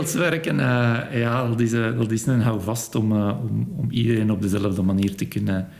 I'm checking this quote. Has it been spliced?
no; 0 cuts

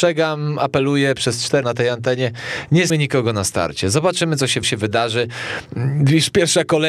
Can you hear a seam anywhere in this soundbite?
yes; 3 cuts; at 1.6 s, 2.9 s, 4.6 s

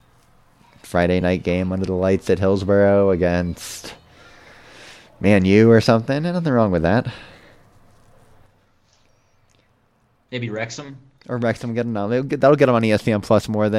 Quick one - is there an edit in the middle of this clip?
no; 0 cuts

